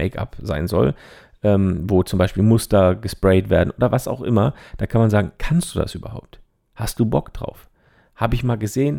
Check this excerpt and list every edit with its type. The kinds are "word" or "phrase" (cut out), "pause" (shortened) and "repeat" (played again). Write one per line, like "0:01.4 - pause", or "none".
none

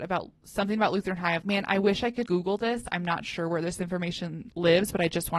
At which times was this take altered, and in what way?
0:01.4 - word
0:02.3 - word

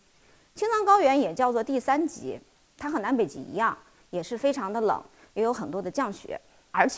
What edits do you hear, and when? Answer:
none

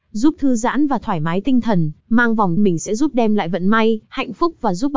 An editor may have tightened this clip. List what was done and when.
0:02.0 - pause
0:02.6 - phrase
0:04.1 - pause

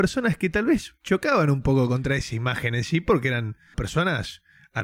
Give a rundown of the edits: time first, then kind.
0:03.7 - word

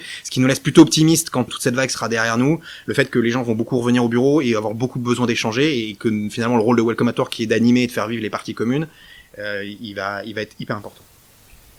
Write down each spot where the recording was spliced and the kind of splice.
0:01.5 - word

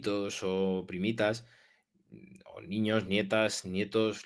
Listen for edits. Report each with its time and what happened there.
none

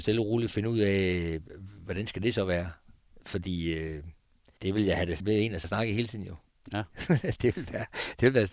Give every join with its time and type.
0:04.6 - word
0:05.2 - word
0:05.6 - word

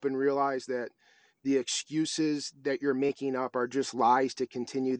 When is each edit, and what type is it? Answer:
none

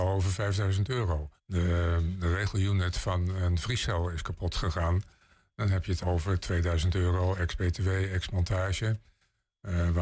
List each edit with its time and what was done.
0:01.4 - pause
0:06.0 - word

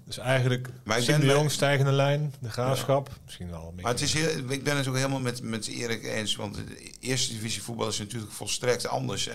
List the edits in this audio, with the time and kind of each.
none

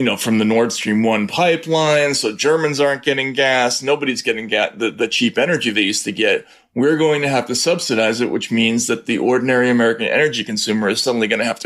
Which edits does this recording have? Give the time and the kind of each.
none

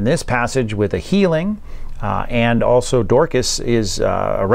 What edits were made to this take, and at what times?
none

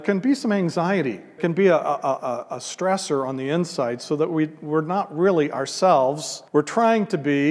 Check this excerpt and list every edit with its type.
0:01.4 - word
0:06.5 - pause

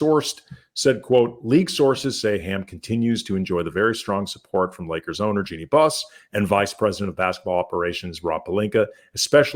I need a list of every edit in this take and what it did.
none

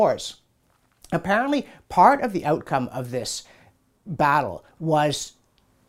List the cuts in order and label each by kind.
none

